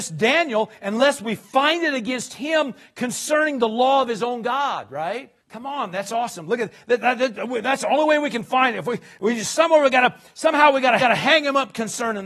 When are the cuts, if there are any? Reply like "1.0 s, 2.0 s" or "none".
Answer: 5.4 s, 11.0 s